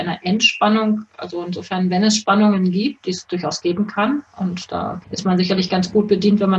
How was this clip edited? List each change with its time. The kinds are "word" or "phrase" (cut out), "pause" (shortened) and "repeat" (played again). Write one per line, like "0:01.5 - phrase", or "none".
0:05.0 - pause